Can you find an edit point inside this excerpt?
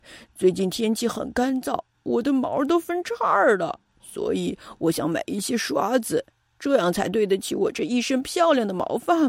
no; 0 cuts

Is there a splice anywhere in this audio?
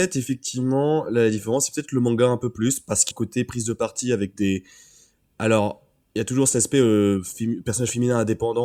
yes; 1 cut; at 3.1 s

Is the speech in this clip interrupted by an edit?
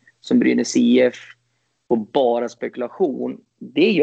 no; 0 cuts

